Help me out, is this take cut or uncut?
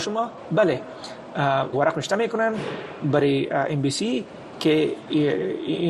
cut